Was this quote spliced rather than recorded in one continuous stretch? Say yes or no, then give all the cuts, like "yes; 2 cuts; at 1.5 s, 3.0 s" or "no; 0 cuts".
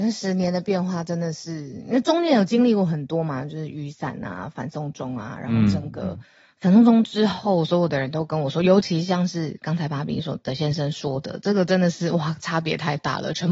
no; 0 cuts